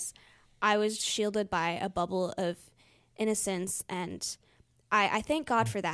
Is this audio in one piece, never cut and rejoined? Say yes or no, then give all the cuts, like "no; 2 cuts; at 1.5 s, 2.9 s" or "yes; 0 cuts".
no; 1 cut; at 1.0 s